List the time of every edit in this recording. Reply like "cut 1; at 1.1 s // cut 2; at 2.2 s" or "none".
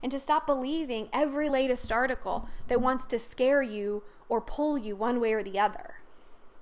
none